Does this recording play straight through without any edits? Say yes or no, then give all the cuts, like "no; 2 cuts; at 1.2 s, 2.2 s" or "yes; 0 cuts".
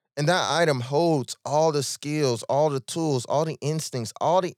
yes; 0 cuts